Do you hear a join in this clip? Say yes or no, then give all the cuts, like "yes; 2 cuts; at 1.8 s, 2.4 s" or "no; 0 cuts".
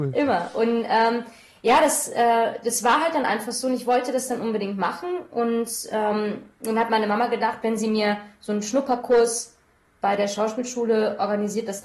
no; 0 cuts